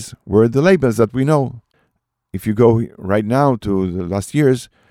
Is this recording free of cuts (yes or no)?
yes